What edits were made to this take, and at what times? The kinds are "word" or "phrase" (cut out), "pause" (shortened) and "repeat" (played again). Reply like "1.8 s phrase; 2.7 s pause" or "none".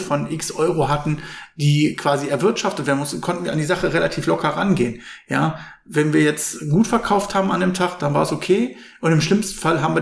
none